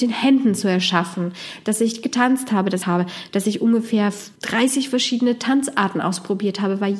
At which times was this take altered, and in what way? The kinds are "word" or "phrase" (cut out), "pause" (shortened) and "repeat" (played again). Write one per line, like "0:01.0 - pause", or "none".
0:02.8 - phrase
0:04.4 - pause